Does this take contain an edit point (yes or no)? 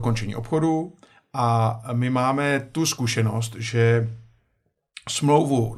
no